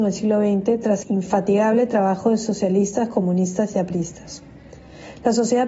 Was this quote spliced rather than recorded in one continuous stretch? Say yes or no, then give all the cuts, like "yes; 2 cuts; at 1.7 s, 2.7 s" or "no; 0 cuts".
yes; 1 cut; at 1.0 s